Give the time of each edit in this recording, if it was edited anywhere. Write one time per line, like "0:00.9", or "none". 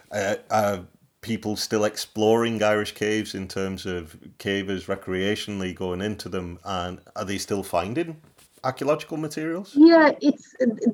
none